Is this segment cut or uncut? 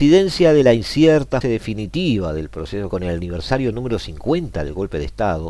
cut